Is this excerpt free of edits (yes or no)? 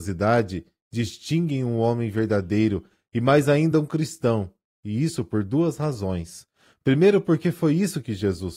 yes